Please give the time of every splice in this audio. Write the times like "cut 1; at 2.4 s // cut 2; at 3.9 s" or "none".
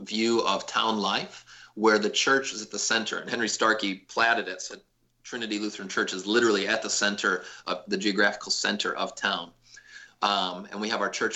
cut 1; at 4.7 s